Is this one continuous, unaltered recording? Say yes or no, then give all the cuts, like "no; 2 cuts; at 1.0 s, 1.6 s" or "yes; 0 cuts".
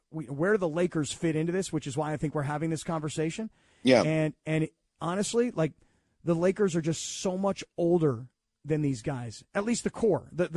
yes; 0 cuts